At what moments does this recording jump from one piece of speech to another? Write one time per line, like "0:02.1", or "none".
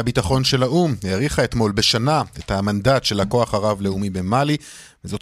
none

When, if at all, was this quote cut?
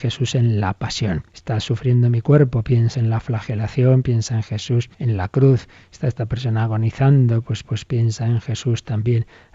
0:01.3
0:02.9
0:04.9
0:07.6

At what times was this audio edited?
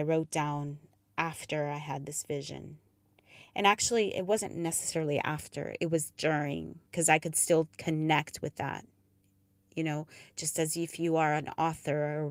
0:06.9
0:07.7

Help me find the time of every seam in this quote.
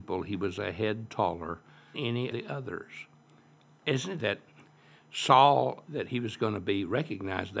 0:01.9
0:02.3
0:04.2
0:05.9

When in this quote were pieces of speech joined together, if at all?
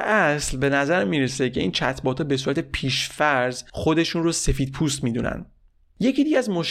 none

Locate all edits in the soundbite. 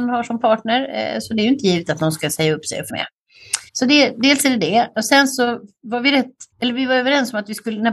0:02.9
0:03.7
0:06.5

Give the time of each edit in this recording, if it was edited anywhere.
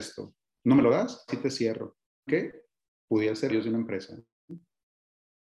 0:01.3
0:02.3
0:03.5

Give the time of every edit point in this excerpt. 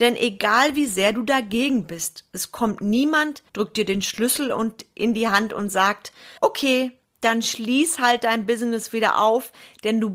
0:03.5
0:06.4

